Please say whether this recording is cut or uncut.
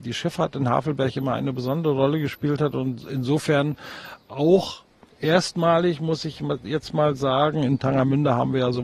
uncut